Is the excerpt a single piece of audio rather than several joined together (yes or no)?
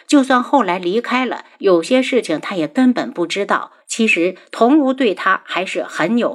no